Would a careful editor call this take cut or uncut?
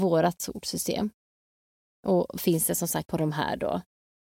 cut